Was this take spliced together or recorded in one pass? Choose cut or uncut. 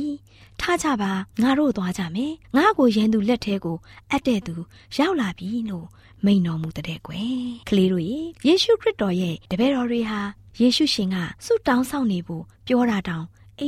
cut